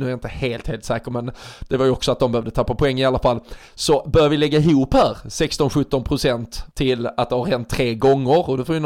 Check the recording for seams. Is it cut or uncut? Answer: cut